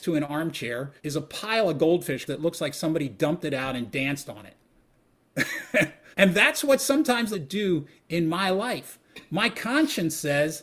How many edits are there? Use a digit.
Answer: 4